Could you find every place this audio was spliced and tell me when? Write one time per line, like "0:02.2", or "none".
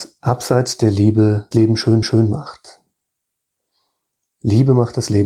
0:01.5
0:02.0